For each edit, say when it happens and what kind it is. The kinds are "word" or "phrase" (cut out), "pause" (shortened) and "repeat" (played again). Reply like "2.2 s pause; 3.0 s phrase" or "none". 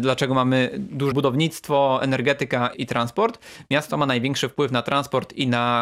1.1 s phrase; 2.7 s word